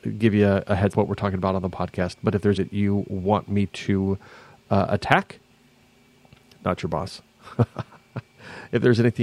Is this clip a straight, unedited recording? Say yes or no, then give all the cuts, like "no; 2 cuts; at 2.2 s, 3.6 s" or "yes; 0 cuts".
no; 2 cuts; at 0.9 s, 2.6 s